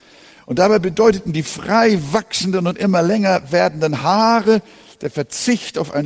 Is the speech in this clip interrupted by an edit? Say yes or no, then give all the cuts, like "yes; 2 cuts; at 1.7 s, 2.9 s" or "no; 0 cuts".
no; 0 cuts